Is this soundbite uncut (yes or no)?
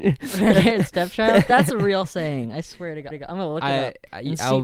no